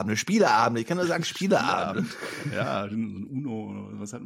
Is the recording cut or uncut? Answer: uncut